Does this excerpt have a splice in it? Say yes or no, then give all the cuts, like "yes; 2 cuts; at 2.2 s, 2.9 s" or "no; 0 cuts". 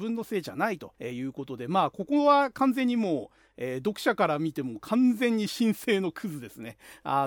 yes; 1 cut; at 0.9 s